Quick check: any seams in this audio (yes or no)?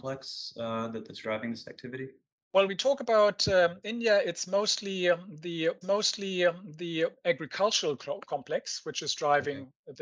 yes